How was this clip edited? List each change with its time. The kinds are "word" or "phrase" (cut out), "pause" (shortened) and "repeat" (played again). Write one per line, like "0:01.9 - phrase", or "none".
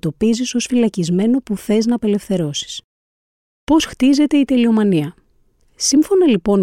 none